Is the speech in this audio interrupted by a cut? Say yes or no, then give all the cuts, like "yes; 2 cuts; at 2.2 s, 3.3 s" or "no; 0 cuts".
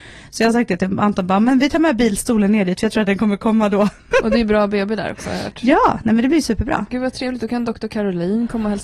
no; 0 cuts